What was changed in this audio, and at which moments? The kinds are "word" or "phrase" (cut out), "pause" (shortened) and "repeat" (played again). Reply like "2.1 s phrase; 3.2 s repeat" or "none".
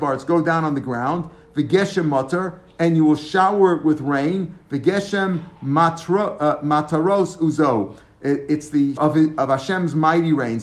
9.0 s word